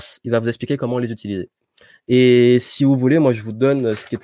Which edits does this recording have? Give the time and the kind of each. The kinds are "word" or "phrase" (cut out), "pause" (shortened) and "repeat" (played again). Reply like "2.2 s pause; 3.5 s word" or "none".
none